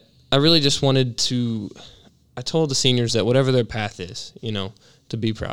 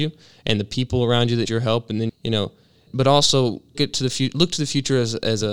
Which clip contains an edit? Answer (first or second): second